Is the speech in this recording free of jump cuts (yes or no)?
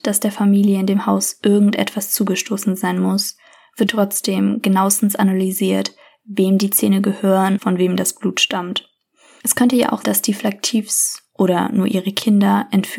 no